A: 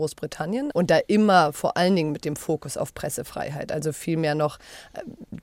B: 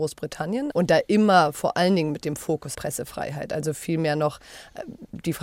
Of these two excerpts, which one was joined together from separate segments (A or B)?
B